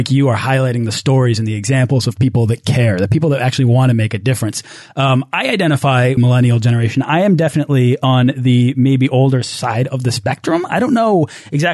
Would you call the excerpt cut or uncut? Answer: cut